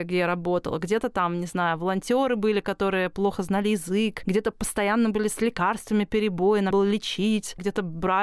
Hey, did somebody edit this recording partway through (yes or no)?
yes